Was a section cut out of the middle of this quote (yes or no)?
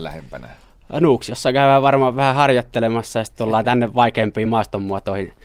no